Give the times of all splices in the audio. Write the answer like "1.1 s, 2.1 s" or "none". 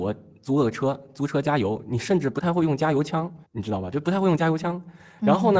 3.5 s